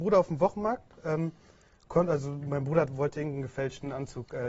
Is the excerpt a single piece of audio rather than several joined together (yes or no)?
yes